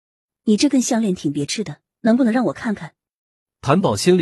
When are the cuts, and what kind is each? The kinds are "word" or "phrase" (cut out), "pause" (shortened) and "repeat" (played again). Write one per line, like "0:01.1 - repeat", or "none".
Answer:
0:02.0 - pause